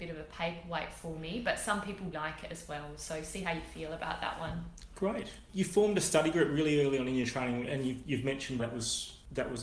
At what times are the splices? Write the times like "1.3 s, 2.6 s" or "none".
2.1 s, 8.6 s